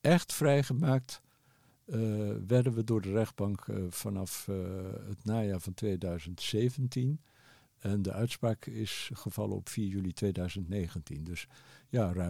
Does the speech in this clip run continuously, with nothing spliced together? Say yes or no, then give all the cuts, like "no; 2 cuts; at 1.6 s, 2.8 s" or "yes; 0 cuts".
yes; 0 cuts